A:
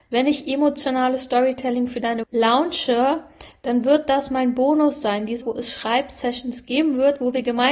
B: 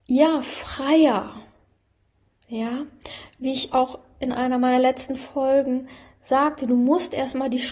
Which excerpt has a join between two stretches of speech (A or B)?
A